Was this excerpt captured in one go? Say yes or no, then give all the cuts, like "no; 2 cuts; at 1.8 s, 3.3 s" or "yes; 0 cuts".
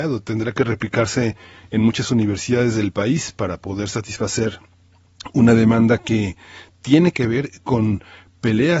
yes; 0 cuts